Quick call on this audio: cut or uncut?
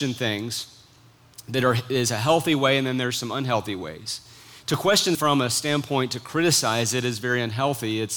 cut